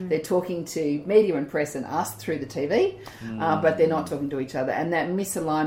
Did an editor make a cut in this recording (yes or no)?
no